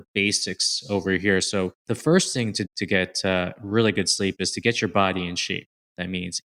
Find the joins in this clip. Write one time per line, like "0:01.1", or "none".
0:01.8
0:02.6